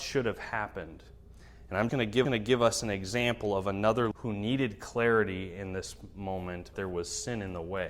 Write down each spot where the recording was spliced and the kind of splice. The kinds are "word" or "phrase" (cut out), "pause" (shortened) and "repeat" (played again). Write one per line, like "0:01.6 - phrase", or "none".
0:01.9 - word
0:02.2 - repeat
0:04.1 - phrase
0:06.7 - word